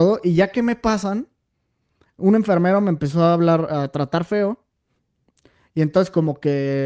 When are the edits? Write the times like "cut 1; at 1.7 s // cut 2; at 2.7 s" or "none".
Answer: none